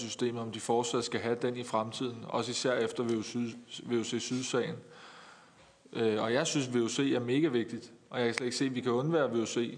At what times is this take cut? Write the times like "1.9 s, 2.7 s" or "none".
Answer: none